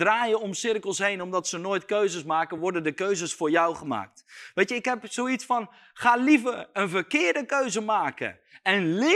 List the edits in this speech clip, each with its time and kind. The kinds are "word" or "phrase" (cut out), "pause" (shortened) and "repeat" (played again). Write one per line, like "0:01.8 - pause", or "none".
none